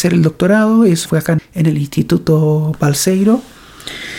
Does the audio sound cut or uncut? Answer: cut